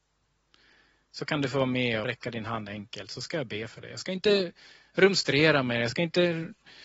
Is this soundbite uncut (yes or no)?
no